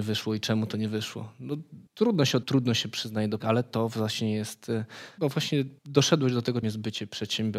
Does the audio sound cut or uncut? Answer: cut